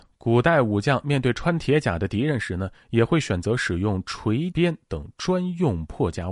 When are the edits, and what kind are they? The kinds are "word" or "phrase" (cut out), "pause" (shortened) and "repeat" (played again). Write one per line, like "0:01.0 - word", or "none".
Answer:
0:04.5 - word